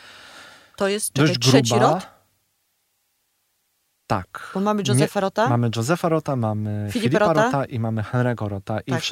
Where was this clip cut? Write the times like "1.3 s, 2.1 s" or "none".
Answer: none